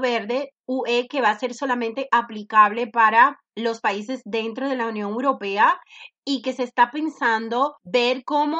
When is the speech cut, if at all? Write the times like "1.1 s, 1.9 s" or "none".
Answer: none